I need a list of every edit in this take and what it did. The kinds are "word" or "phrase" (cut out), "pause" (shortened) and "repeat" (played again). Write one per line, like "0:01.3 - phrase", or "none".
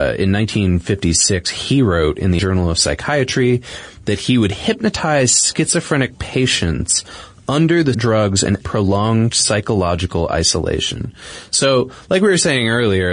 0:02.4 - word
0:07.9 - word
0:08.6 - word